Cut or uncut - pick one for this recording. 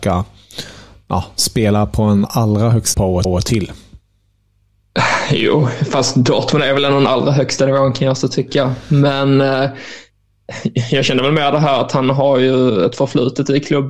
cut